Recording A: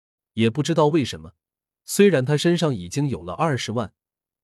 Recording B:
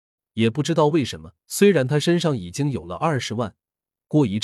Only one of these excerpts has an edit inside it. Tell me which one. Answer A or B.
B